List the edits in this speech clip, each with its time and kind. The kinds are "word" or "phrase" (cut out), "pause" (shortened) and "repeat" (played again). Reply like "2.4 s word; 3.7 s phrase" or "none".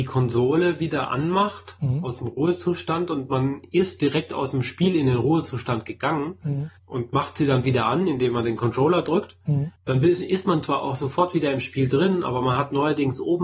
6.8 s pause; 9.8 s pause